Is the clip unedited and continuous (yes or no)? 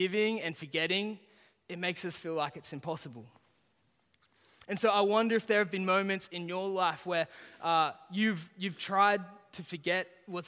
yes